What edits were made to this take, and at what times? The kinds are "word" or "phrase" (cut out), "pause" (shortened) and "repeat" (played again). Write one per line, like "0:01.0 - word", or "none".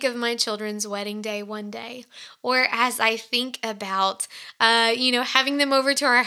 none